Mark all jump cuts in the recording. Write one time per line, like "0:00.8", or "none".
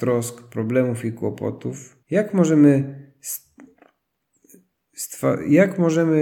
0:02.0